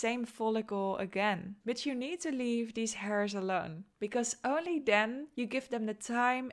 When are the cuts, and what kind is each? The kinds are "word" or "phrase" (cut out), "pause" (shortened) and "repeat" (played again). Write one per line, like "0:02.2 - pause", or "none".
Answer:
0:01.6 - pause
0:05.3 - pause